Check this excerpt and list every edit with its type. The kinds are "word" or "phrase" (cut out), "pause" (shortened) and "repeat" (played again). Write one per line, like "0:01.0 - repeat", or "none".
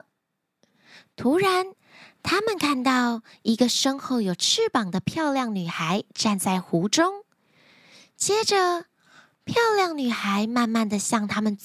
none